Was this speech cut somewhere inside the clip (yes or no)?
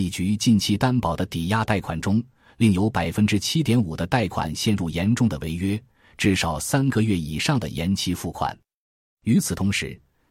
no